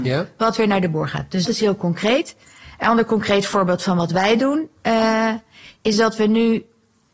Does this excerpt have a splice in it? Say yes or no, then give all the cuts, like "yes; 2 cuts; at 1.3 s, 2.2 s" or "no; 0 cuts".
yes; 1 cut; at 1.5 s